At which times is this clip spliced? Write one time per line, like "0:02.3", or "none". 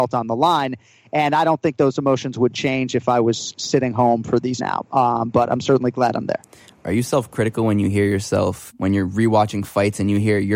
0:04.6